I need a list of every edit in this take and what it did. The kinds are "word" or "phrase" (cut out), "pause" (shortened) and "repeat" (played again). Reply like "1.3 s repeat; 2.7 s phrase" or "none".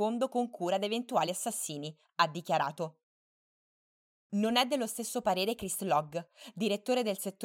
none